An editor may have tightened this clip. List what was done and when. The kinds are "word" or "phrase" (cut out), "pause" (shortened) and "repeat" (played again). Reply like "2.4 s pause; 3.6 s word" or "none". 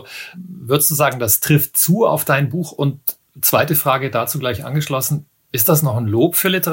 none